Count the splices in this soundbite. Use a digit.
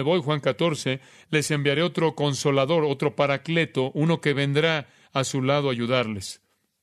0